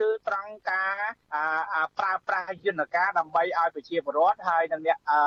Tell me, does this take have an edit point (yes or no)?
yes